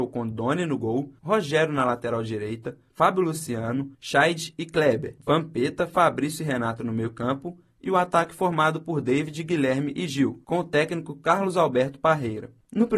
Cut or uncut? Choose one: cut